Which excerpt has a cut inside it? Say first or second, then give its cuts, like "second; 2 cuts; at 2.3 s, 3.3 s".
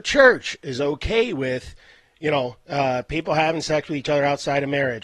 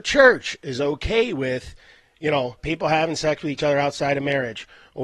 second; 1 cut; at 2.6 s